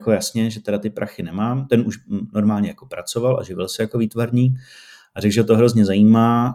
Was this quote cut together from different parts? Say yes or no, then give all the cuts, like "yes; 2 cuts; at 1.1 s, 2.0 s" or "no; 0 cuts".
no; 0 cuts